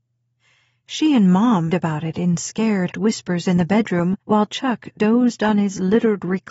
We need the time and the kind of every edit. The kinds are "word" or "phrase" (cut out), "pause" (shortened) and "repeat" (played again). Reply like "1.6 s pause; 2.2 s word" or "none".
1.7 s phrase; 2.9 s word; 4.2 s pause

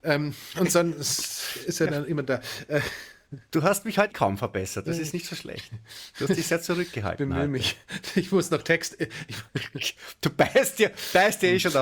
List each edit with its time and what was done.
3.5 s pause; 4.1 s word; 9.5 s pause

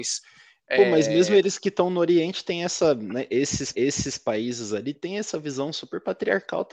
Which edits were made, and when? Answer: 3.7 s repeat

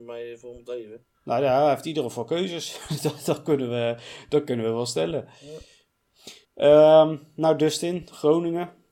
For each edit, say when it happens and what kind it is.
1.1 s pause; 6.4 s pause

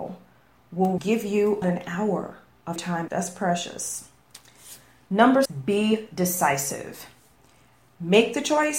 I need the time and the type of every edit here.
1.0 s word; 1.6 s word; 2.8 s word; 3.1 s word; 5.5 s word

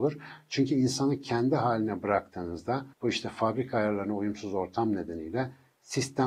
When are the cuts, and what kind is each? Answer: 2.9 s pause

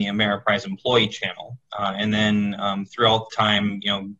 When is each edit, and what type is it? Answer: 3.3 s word

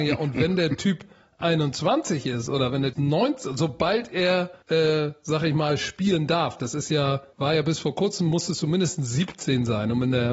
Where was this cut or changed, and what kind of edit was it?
2.9 s word; 4.6 s pause; 7.3 s pause

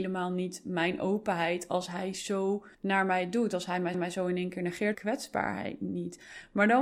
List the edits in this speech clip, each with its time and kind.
2.7 s pause; 3.9 s repeat; 4.9 s phrase

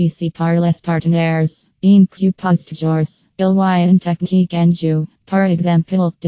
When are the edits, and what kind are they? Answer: 1.7 s pause; 3.3 s pause; 5.2 s pause

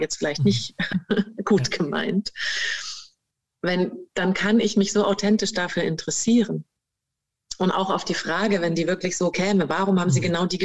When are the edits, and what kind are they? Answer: none

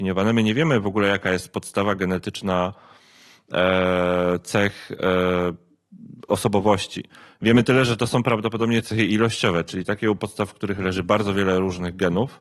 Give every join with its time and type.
none

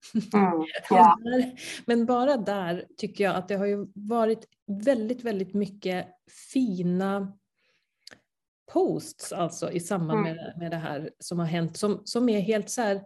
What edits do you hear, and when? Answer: none

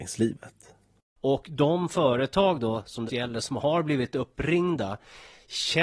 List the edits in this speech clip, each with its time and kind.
3.1 s phrase

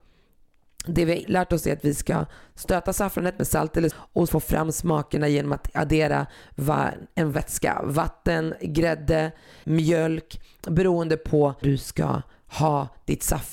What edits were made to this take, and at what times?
1.2 s word; 3.9 s word; 4.3 s word; 7.3 s word; 9.6 s word; 11.6 s word

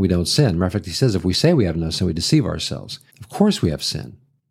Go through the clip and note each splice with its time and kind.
3.1 s pause

